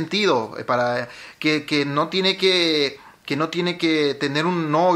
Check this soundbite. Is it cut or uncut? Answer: uncut